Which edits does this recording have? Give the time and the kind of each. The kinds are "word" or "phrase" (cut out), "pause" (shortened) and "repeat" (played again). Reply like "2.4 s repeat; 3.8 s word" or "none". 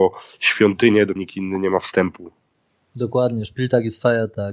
1.2 s word; 2.7 s pause